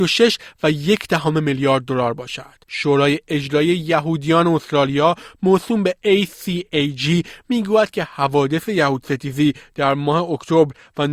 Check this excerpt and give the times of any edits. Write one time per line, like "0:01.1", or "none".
0:02.6